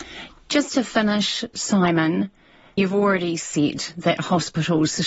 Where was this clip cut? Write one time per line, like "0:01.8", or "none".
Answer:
0:02.8